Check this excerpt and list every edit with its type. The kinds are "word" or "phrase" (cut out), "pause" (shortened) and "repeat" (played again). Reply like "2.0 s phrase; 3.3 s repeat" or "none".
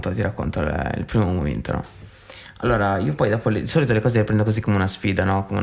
none